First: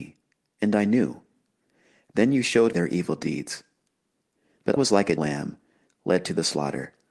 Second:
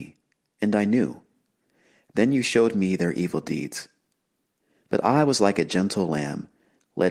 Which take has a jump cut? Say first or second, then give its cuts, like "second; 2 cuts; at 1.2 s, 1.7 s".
first; 3 cuts; at 2.7 s, 4.8 s, 5.2 s